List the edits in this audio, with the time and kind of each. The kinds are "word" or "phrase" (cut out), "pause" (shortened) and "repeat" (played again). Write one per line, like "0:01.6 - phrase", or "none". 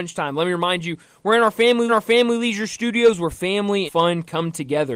0:01.9 - repeat
0:03.9 - word